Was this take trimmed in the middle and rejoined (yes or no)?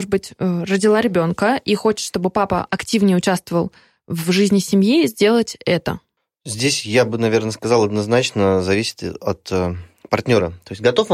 no